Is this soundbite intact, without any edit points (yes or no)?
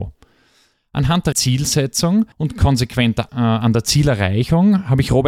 no